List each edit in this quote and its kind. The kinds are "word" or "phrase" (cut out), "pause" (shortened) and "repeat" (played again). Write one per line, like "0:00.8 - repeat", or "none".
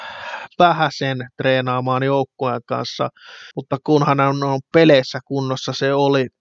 0:03.5 - pause